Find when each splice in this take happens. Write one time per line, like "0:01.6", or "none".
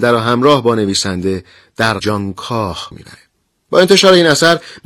0:02.0
0:02.9